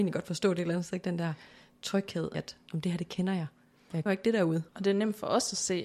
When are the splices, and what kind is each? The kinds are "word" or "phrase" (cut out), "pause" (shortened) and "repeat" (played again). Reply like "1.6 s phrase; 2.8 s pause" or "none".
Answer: 2.3 s word; 4.1 s word; 4.7 s pause